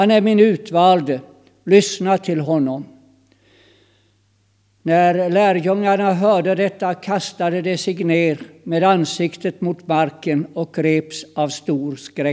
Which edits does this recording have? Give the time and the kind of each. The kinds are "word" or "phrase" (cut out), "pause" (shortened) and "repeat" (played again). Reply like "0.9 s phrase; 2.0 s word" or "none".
none